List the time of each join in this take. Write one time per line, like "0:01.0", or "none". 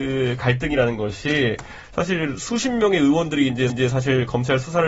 0:03.7